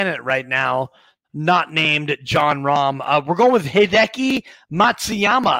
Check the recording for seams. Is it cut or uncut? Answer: uncut